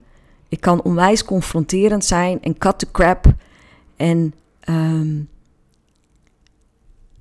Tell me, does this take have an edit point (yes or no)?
no